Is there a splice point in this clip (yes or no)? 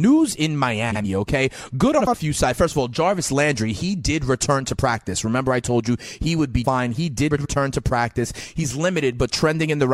yes